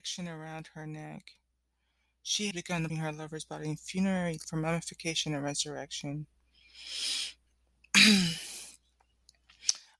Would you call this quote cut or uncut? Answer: cut